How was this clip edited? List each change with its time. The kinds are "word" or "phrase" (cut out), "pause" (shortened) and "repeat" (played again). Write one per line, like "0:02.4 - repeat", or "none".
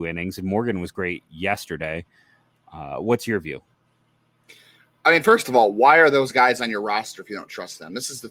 none